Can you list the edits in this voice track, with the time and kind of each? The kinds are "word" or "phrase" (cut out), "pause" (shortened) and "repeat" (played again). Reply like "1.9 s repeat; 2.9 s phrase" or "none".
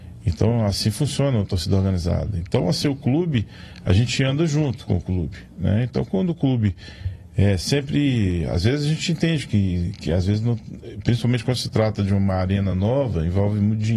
none